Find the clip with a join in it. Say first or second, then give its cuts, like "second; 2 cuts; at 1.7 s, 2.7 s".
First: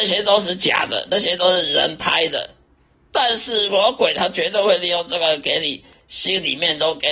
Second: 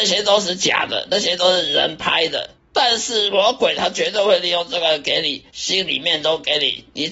second; 2 cuts; at 2.6 s, 5.5 s